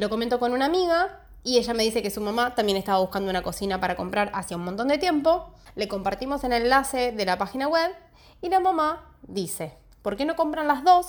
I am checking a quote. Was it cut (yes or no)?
no